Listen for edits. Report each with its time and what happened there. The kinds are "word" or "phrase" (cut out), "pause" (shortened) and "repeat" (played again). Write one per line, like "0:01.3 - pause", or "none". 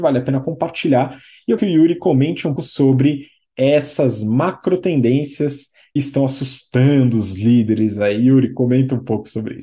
0:01.6 - word
0:02.6 - word
0:06.0 - word